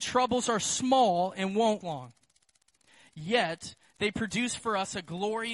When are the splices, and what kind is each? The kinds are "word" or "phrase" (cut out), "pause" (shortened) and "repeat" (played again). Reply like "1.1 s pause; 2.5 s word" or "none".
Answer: 1.8 s word